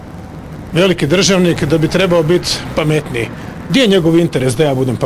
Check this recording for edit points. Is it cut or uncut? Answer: uncut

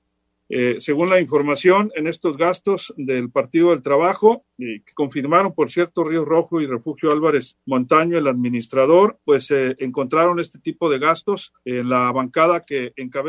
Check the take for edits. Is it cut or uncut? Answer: cut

